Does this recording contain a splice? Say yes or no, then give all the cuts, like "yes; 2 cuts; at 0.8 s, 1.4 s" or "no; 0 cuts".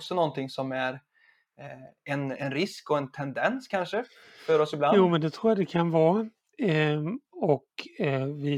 no; 0 cuts